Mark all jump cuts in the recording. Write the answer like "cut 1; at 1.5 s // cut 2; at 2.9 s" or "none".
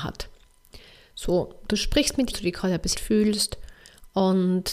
cut 1; at 2.3 s // cut 2; at 2.9 s